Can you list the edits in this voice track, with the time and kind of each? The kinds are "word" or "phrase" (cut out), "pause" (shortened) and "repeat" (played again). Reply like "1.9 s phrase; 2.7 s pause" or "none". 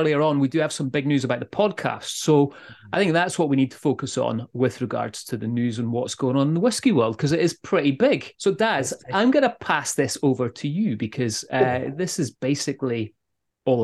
8.3 s pause

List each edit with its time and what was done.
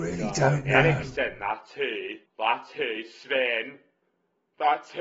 2.3 s pause

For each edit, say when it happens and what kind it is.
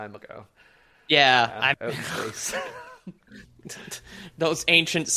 1.7 s word

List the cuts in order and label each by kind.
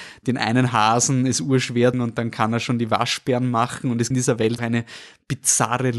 1.9 s phrase; 4.1 s phrase; 4.6 s word

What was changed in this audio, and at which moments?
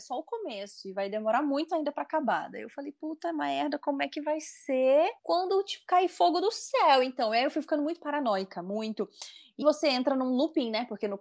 5.2 s pause; 9.6 s word

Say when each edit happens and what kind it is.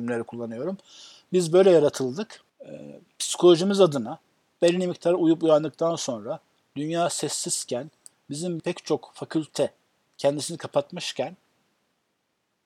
2.5 s pause; 8.6 s word

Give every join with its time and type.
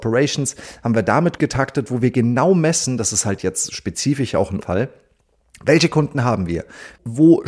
1.4 s word; 4.6 s word

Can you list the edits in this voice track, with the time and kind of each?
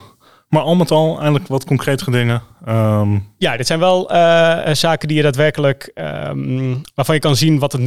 none

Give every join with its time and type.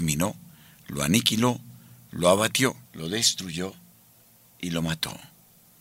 2.8 s pause

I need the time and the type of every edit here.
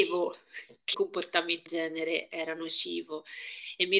0.9 s word; 1.7 s word

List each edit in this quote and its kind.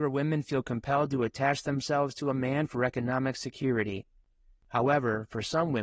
none

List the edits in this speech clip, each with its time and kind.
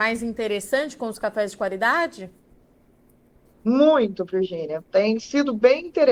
none

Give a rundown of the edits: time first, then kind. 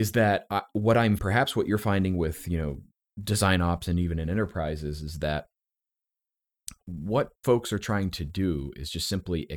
1.2 s phrase; 7.4 s pause

